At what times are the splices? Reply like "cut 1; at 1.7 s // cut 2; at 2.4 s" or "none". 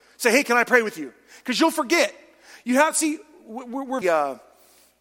cut 1; at 4.0 s